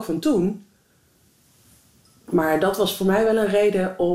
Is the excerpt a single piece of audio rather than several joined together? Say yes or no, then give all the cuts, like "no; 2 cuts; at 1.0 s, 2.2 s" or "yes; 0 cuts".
yes; 0 cuts